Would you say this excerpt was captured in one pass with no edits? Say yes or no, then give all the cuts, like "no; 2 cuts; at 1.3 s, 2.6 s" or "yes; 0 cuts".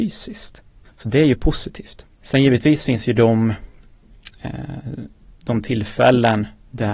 no; 1 cut; at 2.1 s